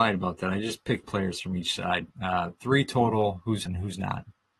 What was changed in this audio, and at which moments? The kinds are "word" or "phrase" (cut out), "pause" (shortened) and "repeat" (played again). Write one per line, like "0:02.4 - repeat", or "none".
0:01.0 - word
0:02.1 - pause
0:03.7 - word